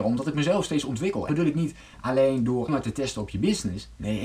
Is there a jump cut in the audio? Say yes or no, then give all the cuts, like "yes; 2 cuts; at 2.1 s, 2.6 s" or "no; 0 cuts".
yes; 2 cuts; at 1.3 s, 2.7 s